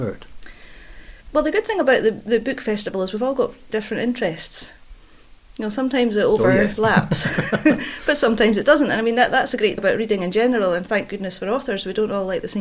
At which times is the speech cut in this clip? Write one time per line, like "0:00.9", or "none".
0:01.2
0:03.7
0:09.8